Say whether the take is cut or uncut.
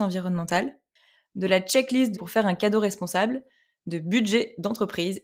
cut